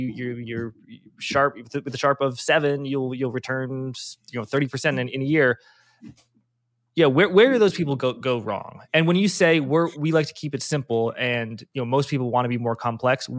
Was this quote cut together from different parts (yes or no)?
no